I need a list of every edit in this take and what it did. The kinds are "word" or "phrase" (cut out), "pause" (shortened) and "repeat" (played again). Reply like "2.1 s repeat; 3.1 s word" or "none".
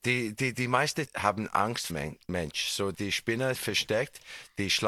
1.1 s word; 1.9 s word; 2.9 s word; 3.5 s word